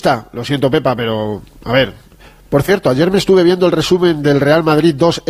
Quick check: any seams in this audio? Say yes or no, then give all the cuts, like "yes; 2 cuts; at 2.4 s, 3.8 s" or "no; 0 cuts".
no; 0 cuts